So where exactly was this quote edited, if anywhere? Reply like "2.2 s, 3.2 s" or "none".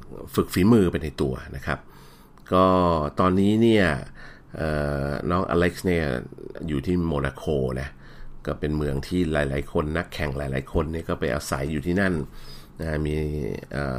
none